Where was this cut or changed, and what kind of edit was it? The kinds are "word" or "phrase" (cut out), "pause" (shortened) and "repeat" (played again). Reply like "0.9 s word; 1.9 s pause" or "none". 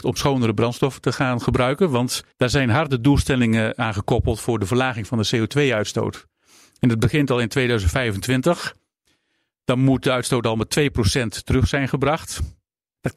2.3 s pause